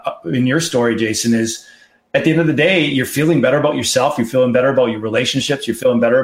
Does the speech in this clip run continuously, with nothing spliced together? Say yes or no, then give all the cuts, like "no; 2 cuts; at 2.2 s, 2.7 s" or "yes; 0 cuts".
yes; 0 cuts